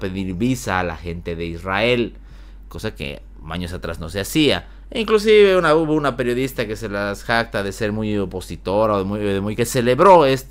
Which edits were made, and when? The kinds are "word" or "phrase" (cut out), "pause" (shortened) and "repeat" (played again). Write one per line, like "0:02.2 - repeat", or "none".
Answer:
0:09.6 - phrase